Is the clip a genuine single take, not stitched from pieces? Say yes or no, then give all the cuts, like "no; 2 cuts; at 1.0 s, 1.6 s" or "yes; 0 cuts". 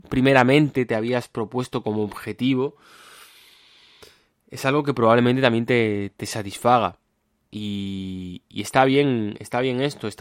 yes; 0 cuts